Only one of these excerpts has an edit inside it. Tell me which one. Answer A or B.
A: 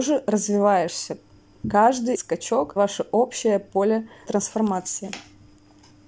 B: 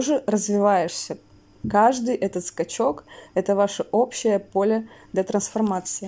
A